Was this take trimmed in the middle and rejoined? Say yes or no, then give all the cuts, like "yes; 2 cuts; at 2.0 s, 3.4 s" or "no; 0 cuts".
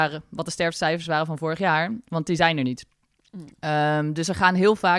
no; 0 cuts